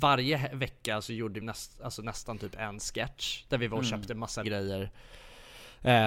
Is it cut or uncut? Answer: cut